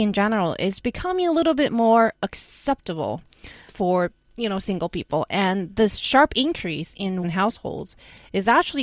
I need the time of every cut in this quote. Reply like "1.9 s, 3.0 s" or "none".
3.7 s, 7.2 s